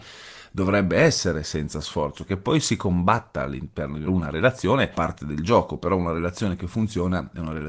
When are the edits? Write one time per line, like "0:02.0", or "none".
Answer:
0:04.1
0:04.9